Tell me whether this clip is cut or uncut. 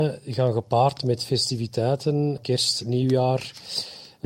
uncut